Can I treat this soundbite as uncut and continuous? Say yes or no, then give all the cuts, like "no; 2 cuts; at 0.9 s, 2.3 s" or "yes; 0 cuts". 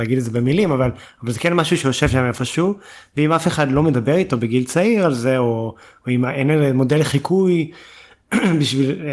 yes; 0 cuts